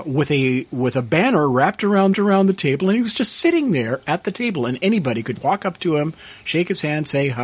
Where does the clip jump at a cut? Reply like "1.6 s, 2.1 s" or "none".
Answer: 2.1 s, 5.4 s